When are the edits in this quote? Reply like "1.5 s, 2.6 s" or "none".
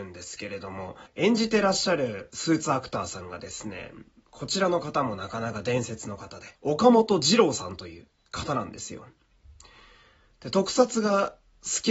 1.1 s, 6.6 s